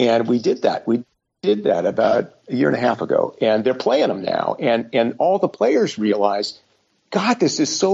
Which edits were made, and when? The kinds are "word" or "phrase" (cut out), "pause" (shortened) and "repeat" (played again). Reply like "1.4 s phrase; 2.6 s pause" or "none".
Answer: none